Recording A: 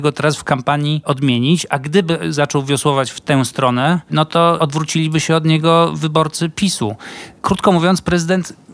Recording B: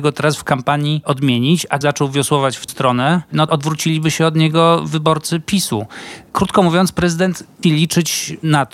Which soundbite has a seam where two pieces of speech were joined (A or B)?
B